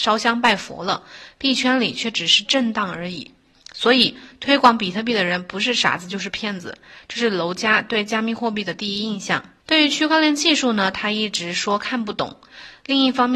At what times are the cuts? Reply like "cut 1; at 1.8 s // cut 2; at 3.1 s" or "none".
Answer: cut 1; at 9.6 s